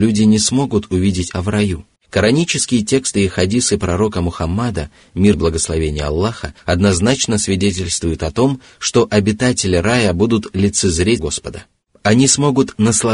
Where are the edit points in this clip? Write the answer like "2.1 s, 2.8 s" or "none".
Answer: 1.3 s, 2.0 s, 5.3 s, 6.6 s, 11.2 s